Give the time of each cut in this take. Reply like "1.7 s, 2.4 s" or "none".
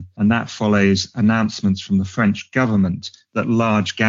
none